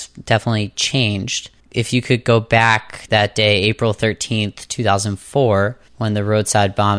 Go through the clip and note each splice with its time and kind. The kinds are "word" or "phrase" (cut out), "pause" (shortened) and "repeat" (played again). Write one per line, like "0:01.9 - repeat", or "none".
0:01.6 - pause
0:03.1 - word
0:05.9 - pause